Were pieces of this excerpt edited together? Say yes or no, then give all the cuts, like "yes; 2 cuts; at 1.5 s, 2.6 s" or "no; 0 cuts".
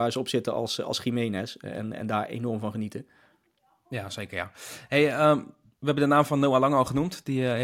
no; 0 cuts